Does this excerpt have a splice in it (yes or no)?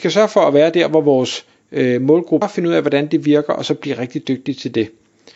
yes